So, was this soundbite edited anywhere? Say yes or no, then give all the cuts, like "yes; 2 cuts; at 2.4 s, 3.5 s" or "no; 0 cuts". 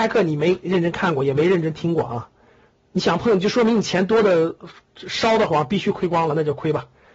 no; 0 cuts